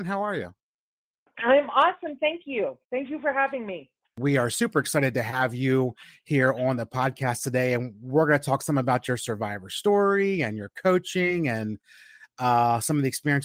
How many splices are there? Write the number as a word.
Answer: two